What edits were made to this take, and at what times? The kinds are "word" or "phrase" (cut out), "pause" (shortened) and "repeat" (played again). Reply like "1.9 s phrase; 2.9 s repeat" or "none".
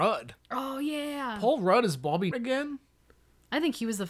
2.3 s word